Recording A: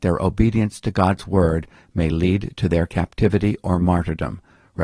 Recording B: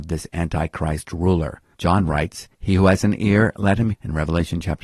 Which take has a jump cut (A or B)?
B